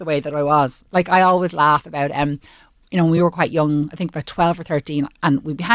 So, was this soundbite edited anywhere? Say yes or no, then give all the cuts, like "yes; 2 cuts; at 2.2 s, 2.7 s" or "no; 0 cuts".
no; 0 cuts